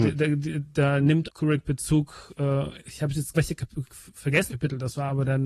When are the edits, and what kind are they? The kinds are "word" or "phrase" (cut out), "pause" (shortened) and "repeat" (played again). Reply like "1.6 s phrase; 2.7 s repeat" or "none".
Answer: 1.2 s word; 2.8 s word; 3.3 s word; 4.5 s word